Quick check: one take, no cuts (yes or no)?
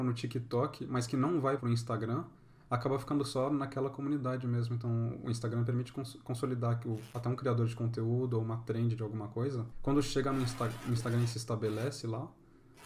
no